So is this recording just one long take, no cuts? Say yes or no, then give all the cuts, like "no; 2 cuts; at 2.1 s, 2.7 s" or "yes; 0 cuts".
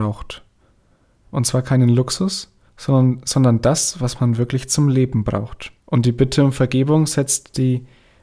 no; 2 cuts; at 2.7 s, 5.8 s